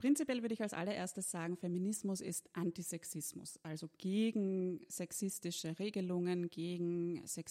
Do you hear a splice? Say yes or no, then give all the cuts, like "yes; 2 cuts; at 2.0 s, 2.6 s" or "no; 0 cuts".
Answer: no; 0 cuts